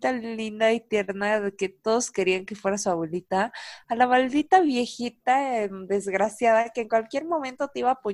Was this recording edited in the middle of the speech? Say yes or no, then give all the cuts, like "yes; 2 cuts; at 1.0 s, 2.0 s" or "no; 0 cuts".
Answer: no; 0 cuts